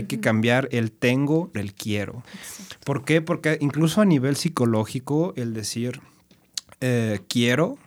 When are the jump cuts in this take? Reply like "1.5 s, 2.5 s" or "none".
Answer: 1.5 s, 2.3 s